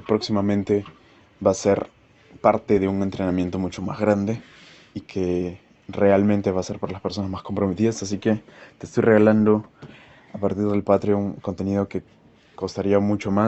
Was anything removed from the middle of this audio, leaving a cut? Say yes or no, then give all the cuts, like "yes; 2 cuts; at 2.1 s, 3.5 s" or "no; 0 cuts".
no; 0 cuts